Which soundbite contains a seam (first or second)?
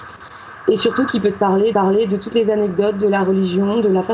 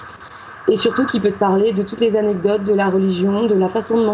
first